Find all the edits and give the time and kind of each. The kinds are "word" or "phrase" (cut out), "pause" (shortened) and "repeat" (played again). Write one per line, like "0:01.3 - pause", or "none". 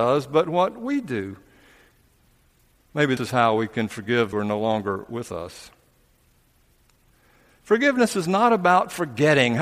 0:03.2 - word
0:04.3 - phrase